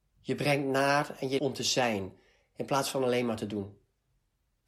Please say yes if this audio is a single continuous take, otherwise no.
no